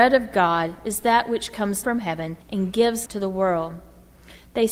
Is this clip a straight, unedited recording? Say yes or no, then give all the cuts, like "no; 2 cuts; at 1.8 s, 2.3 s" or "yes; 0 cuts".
no; 3 cuts; at 1.8 s, 2.4 s, 3.1 s